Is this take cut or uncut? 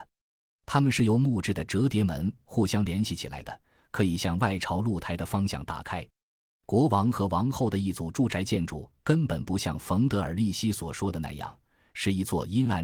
uncut